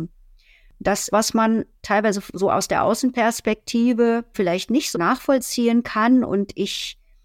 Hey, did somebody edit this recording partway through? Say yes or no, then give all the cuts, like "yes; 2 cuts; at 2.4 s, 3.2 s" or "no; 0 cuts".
yes; 4 cuts; at 1.1 s, 1.7 s, 4.3 s, 4.9 s